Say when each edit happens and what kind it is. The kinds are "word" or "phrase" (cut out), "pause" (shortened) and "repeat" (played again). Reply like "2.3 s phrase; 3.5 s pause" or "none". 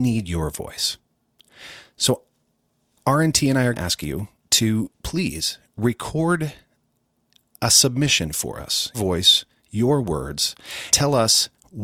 3.7 s word; 8.9 s word; 10.9 s word